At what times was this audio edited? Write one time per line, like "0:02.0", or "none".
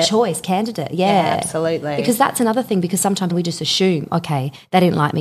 0:03.3